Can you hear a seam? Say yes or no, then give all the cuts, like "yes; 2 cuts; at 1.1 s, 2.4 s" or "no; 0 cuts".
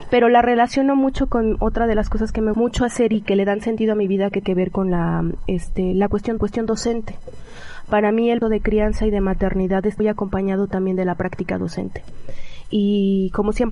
yes; 5 cuts; at 2.5 s, 4.4 s, 6.4 s, 8.4 s, 10.0 s